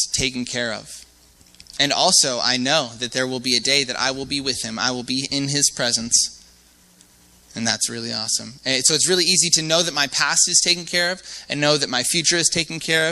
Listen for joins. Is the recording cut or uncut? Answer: uncut